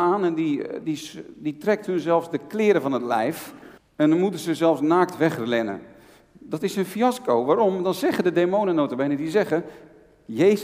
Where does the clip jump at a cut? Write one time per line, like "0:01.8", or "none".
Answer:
0:03.8